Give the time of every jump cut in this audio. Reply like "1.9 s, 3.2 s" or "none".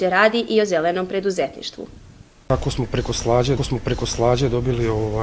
3.6 s